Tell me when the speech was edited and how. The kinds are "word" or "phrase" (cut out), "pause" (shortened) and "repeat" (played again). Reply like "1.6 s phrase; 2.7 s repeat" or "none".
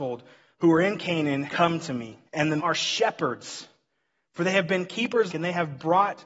1.5 s word; 2.3 s pause; 2.6 s word; 5.3 s phrase